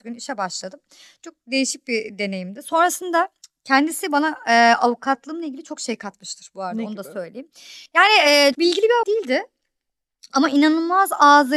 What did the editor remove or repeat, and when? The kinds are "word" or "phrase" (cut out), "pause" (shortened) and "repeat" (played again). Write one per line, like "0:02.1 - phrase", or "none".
0:03.4 - pause
0:07.9 - pause
0:08.5 - word
0:09.0 - word